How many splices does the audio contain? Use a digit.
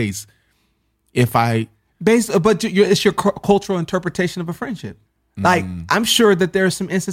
1